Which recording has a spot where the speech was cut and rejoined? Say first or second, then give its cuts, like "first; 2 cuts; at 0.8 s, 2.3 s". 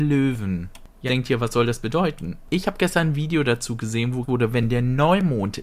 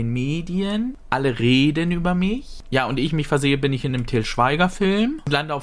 first; 2 cuts; at 1.1 s, 4.2 s